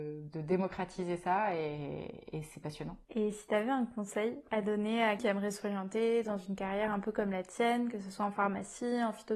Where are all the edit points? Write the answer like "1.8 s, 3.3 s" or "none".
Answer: 3.0 s, 5.2 s